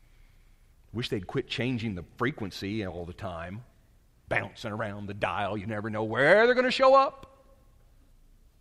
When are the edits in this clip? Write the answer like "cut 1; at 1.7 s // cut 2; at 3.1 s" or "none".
none